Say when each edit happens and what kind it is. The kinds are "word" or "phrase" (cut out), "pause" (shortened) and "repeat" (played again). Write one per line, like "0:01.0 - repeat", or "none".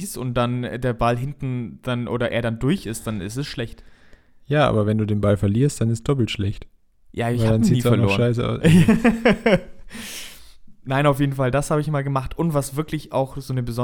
none